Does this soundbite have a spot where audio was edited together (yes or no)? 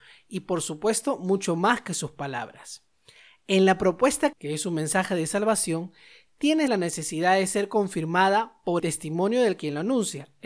yes